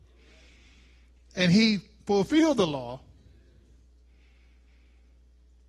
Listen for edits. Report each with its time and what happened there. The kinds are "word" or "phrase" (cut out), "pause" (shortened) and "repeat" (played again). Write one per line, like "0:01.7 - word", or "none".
none